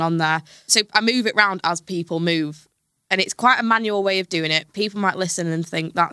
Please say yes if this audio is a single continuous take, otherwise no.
yes